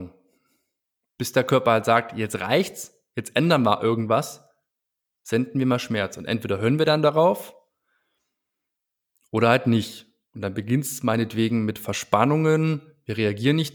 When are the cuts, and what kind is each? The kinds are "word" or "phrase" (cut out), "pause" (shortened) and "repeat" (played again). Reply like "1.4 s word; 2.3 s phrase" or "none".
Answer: none